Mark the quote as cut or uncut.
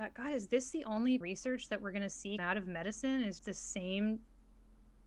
cut